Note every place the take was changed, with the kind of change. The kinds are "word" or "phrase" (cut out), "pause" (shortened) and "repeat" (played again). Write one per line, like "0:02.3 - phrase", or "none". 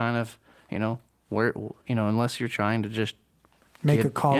none